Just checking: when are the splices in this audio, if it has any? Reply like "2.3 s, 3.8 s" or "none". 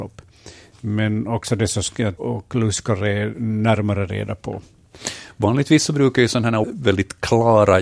2.2 s, 6.6 s